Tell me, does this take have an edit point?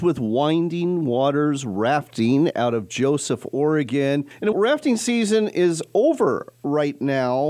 yes; 1 cut; at 4.5 s

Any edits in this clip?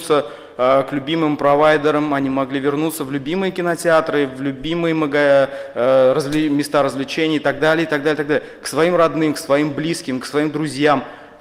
no; 0 cuts

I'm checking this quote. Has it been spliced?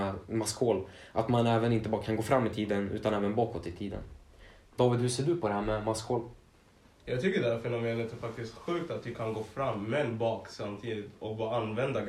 no; 0 cuts

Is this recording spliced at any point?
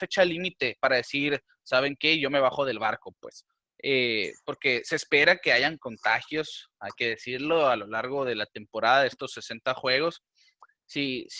no; 0 cuts

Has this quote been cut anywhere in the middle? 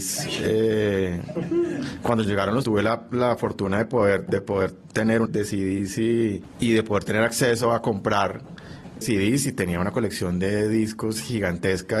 yes; 4 cuts; at 2.2 s, 2.6 s, 5.2 s, 9.0 s

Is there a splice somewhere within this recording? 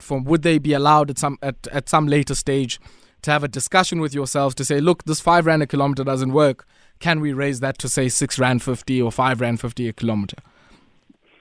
no; 0 cuts

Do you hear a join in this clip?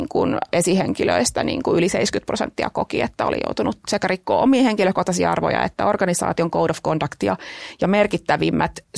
no; 0 cuts

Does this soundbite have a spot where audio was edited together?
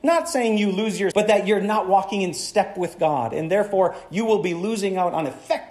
yes; 1 cut; at 1.1 s

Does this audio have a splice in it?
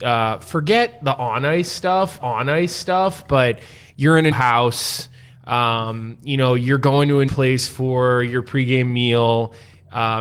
yes; 3 cuts; at 2.2 s, 4.3 s, 7.3 s

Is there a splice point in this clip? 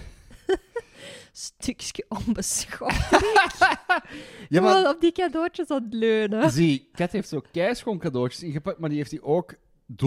no; 0 cuts

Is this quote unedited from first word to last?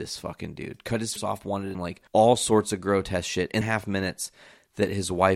no; 4 cuts; at 1.2 s, 1.7 s, 2.1 s, 3.6 s

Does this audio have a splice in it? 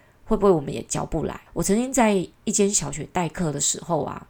yes; 1 cut; at 1.5 s

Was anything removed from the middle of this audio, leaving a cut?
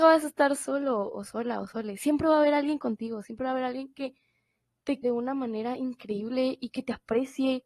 yes; 1 cut; at 5.0 s

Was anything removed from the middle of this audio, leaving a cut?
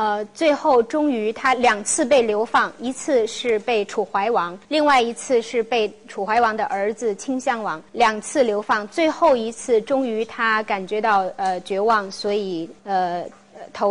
yes; 3 cuts; at 4.6 s, 7.9 s, 12.8 s

